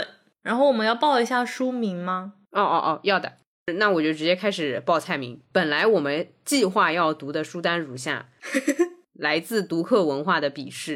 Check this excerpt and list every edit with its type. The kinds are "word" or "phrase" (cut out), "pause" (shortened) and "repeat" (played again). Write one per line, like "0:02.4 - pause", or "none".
0:05.4 - pause